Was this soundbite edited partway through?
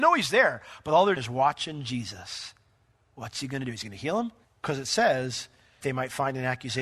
yes; 3 cuts; at 1.2 s, 4.4 s, 5.8 s

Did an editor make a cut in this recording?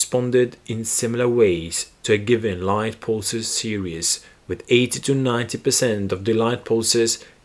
no; 0 cuts

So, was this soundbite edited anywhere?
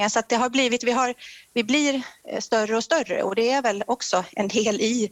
no; 0 cuts

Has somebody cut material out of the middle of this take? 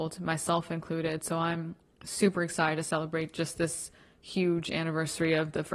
no; 0 cuts

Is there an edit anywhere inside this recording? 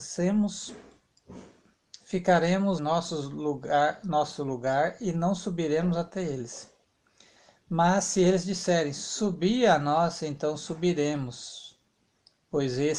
yes; 1 cut; at 2.8 s

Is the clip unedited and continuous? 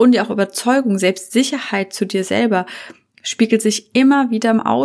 yes; 0 cuts

